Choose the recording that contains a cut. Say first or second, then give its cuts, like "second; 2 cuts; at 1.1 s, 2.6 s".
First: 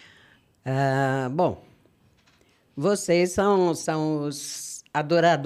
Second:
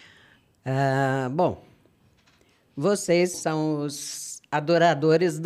second; 1 cut; at 3.3 s